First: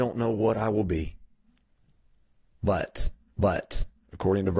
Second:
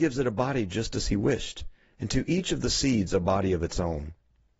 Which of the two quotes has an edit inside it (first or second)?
first